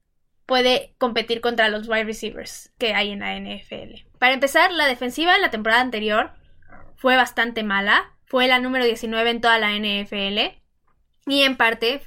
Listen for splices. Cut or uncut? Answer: cut